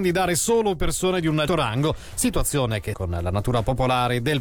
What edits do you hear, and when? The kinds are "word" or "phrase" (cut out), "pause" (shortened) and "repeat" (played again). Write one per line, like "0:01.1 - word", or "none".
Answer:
0:01.5 - word
0:02.9 - word